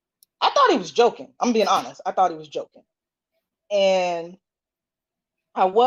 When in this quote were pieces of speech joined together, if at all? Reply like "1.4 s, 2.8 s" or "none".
none

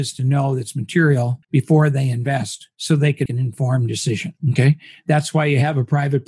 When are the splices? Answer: 1.4 s, 3.3 s

